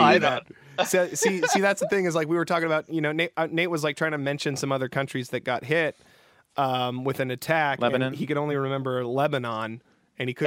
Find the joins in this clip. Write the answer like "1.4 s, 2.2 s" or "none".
none